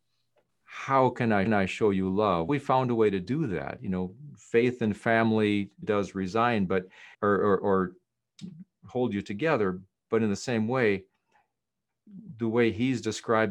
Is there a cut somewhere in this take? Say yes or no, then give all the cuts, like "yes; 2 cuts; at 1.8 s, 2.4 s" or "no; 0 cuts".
yes; 4 cuts; at 1.5 s, 2.5 s, 5.8 s, 7.1 s